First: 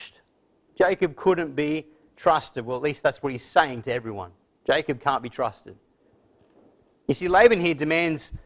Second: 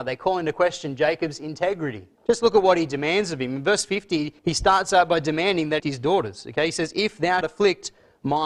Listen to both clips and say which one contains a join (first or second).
second